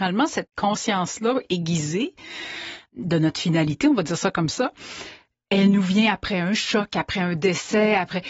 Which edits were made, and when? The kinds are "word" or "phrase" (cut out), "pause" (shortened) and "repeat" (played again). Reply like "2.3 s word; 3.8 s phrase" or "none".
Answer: none